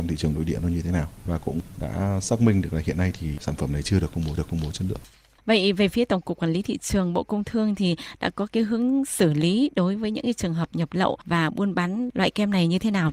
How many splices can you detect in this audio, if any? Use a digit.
1